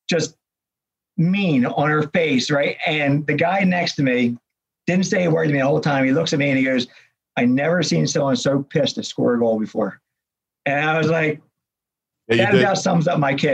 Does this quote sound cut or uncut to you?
uncut